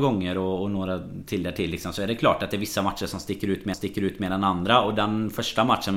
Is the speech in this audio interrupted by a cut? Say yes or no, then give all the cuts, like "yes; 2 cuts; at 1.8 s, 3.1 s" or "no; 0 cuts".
yes; 1 cut; at 3.7 s